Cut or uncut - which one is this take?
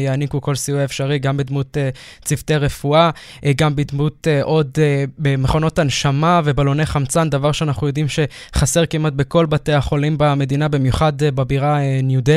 uncut